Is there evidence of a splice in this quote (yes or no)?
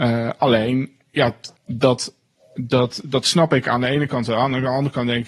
yes